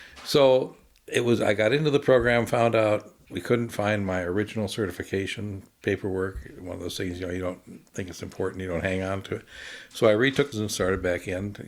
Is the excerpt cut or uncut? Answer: cut